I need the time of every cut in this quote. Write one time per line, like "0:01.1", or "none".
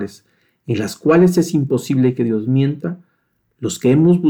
none